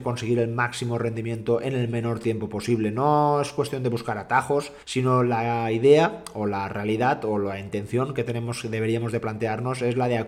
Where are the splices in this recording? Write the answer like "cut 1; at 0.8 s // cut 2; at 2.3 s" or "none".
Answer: cut 1; at 4.8 s